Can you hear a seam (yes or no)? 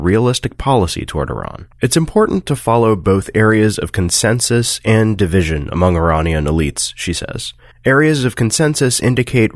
yes